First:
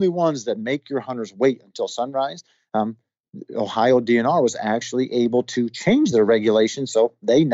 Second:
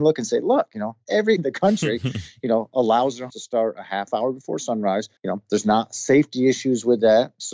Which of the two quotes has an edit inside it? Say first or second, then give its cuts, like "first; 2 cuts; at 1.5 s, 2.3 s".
second; 3 cuts; at 1.4 s, 3.3 s, 5.2 s